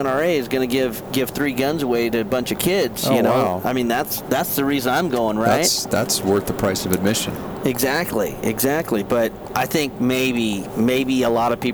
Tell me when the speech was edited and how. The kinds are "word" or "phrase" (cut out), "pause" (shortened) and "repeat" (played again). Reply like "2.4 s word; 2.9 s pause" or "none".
none